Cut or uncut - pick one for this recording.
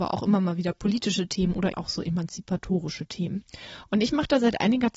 cut